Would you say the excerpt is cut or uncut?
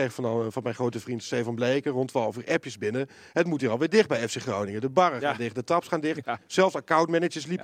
uncut